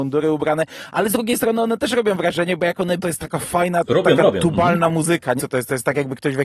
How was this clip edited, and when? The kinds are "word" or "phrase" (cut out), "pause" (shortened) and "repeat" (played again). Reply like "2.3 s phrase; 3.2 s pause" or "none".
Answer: 3.0 s word; 5.4 s word